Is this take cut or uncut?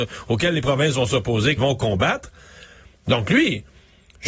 cut